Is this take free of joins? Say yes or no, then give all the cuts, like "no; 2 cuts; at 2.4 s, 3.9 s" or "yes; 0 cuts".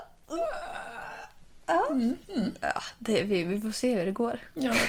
no; 1 cut; at 2.2 s